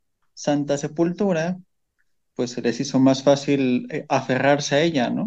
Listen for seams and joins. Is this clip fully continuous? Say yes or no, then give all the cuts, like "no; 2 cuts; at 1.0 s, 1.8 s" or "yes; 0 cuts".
yes; 0 cuts